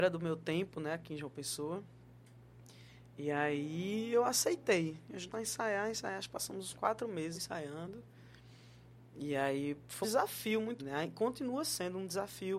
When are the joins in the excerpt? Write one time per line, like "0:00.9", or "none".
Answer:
0:05.3
0:07.3
0:10.0
0:10.8